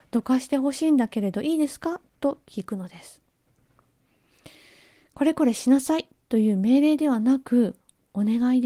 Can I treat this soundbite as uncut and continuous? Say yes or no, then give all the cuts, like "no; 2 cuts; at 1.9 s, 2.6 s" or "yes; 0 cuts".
yes; 0 cuts